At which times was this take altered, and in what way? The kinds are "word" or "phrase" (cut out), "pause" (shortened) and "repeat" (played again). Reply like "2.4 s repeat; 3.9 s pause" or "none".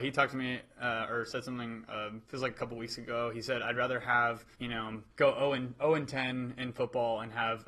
2.2 s pause; 4.5 s pause; 5.1 s pause